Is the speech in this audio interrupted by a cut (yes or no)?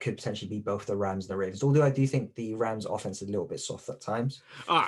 no